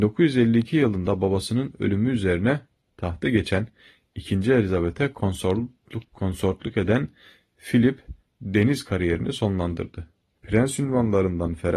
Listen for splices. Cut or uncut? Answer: uncut